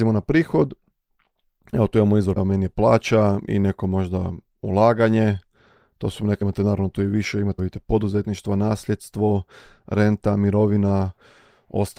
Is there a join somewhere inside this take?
yes; 3 cuts; at 2.4 s, 6.4 s, 7.6 s

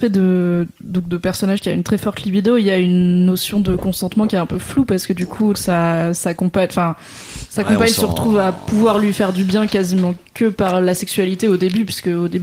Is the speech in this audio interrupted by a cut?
yes; 1 cut; at 5.5 s

